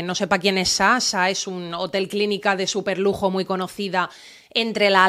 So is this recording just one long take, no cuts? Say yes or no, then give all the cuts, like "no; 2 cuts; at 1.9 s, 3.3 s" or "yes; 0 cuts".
yes; 0 cuts